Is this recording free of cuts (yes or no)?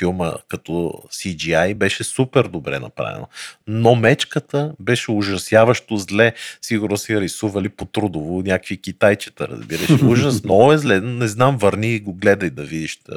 yes